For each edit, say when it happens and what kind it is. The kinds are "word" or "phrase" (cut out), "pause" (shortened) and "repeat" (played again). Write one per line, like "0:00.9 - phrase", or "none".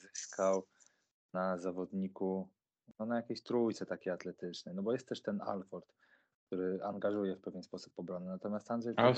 0:02.9 - pause